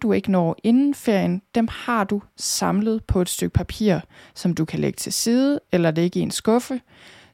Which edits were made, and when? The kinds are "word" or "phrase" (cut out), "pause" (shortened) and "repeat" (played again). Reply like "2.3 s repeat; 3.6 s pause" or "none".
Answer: none

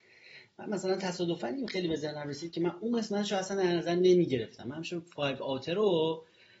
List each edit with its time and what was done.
none

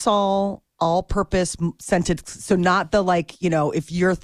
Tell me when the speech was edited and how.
none

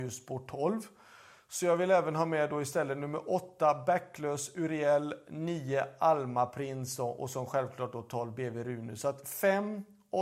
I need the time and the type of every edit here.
none

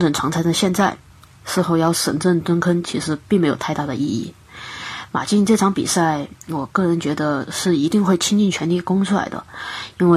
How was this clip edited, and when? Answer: none

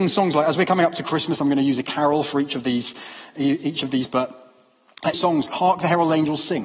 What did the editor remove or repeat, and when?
4.1 s word; 5.1 s word; 5.5 s word

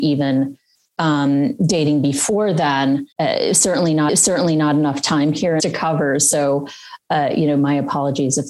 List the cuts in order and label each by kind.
3.1 s pause; 4.1 s repeat; 5.6 s phrase

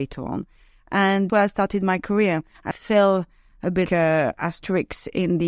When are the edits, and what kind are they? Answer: 1.3 s word; 2.7 s word; 3.9 s word

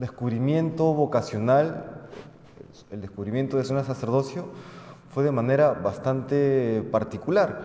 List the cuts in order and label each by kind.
3.7 s word

